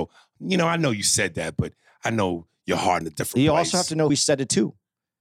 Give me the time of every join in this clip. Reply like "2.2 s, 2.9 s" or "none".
3.0 s, 4.1 s